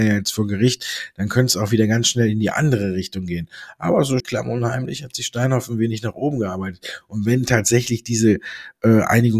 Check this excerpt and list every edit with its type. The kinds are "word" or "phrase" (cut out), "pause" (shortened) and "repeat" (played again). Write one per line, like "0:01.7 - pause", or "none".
0:04.2 - word